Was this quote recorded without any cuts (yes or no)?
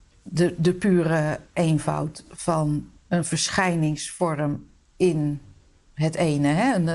no